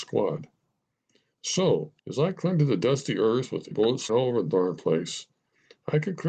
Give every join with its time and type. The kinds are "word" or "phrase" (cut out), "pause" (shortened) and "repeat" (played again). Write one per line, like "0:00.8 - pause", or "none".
0:02.0 - pause
0:03.7 - word
0:04.1 - word